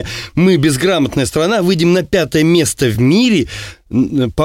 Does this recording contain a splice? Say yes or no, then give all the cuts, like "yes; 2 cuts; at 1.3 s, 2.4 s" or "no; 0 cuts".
no; 0 cuts